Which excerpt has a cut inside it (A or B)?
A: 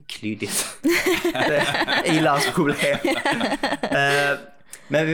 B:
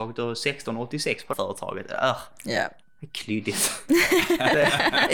B